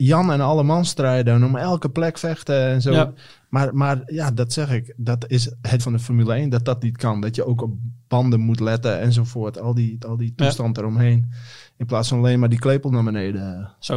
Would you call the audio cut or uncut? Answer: cut